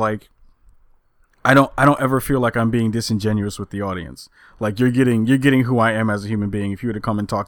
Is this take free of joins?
yes; 0 cuts

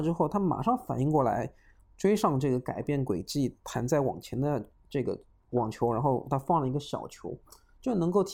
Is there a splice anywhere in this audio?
no; 0 cuts

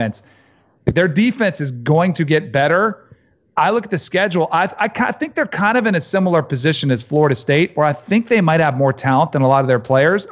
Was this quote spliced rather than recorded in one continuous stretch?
no; 0 cuts

